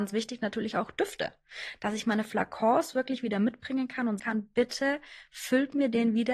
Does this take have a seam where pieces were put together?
yes; 1 cut; at 4.2 s

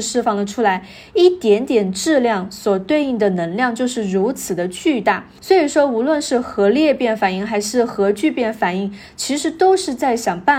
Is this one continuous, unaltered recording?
no; 1 cut; at 5.4 s

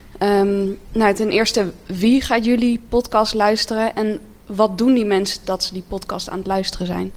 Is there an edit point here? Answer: yes; 2 cuts; at 4.4 s, 5.4 s

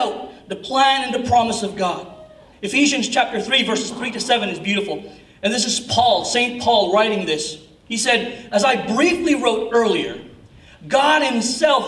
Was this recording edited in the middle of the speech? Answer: no; 0 cuts

